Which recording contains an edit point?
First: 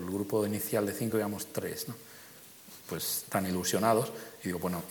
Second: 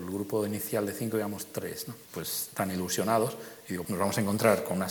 second; 2 cuts; at 2.0 s, 3.8 s

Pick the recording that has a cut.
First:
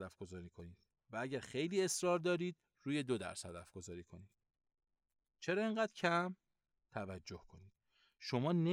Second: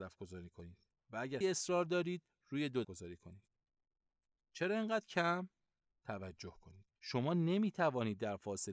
second; 3 cuts; at 1.4 s, 2.8 s, 7.0 s

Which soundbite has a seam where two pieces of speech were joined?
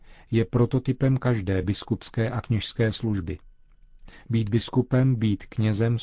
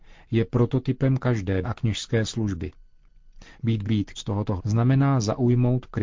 second; 4 cuts; at 1.6 s, 3.8 s, 4.2 s, 4.6 s

